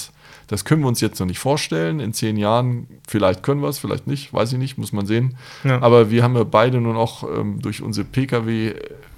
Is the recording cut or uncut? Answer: uncut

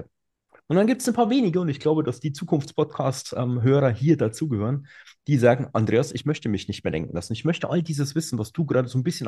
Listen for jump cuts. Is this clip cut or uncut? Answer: uncut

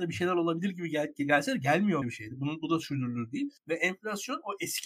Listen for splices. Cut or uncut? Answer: cut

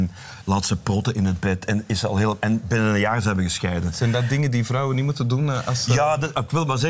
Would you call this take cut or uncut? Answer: uncut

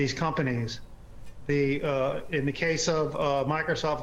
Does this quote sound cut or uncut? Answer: uncut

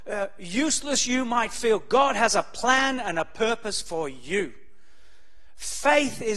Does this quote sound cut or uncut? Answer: uncut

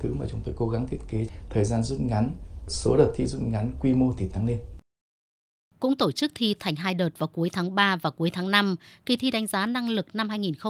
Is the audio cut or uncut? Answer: uncut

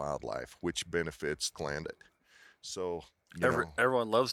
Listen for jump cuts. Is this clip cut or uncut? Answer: cut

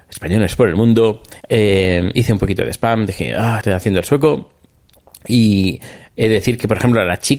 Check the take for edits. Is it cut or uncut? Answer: cut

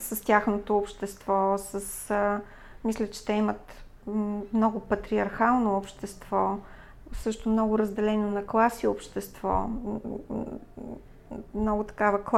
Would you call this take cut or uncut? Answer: uncut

